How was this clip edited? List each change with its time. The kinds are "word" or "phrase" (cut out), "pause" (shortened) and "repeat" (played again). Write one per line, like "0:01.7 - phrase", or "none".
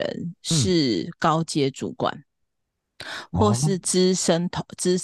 none

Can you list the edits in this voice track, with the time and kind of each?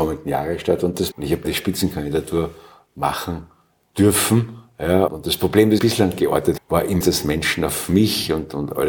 0:01.1 - word
0:01.4 - word
0:05.1 - word
0:05.8 - word
0:06.6 - word
0:07.0 - word

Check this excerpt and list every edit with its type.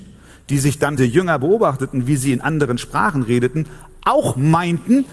0:01.0 - phrase

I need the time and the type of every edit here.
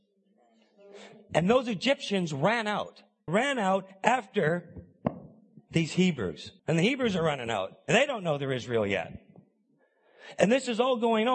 0:03.3 - word
0:06.6 - pause

